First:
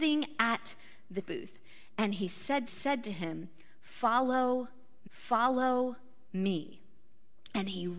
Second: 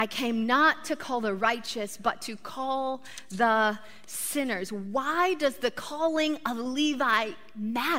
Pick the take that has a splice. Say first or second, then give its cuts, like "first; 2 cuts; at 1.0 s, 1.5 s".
first; 3 cuts; at 1.2 s, 2.7 s, 5.0 s